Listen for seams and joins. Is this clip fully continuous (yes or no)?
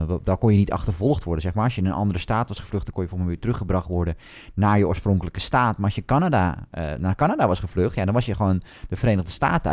yes